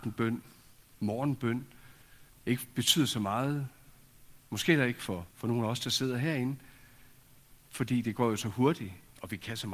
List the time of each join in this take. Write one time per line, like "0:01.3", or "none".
0:02.3
0:05.3
0:07.6